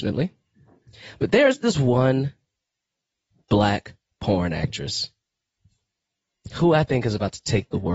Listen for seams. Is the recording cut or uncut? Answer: uncut